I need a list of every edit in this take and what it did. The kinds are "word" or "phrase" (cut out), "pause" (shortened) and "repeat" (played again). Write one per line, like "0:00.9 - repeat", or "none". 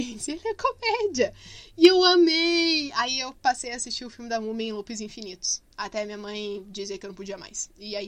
0:05.7 - pause

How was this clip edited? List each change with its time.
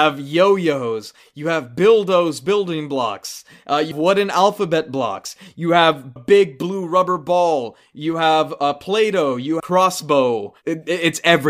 0:03.9 - word
0:06.2 - word
0:09.6 - phrase

